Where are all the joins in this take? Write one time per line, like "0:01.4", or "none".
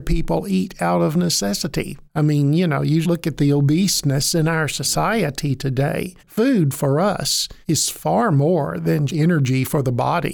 0:02.1
0:03.0
0:06.2
0:07.6
0:09.1